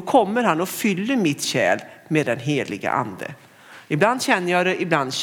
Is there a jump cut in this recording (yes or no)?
no